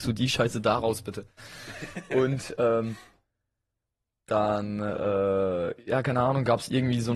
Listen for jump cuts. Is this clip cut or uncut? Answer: uncut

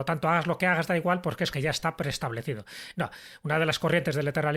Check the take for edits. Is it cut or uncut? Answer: cut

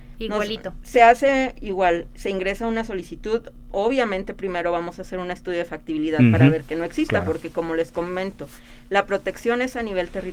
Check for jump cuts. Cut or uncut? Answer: uncut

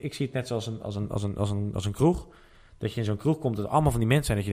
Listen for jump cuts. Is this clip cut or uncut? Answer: uncut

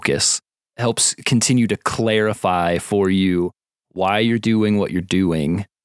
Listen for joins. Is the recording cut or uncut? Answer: uncut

